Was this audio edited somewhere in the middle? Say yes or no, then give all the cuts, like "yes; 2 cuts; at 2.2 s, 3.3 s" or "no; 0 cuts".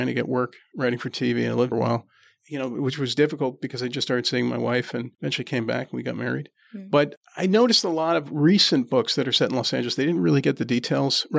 yes; 2 cuts; at 1.7 s, 5.1 s